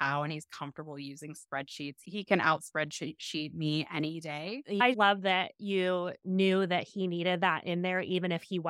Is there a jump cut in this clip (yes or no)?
yes